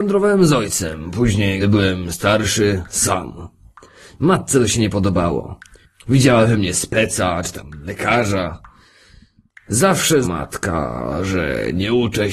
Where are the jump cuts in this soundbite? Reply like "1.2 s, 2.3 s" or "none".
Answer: 1.6 s, 10.2 s